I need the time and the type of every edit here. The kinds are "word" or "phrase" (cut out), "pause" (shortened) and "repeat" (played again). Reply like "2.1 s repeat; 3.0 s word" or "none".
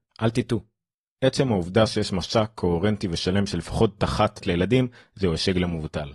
4.0 s word; 4.4 s word